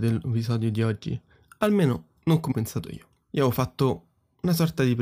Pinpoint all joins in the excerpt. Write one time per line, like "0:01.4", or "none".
0:02.2
0:02.5
0:03.2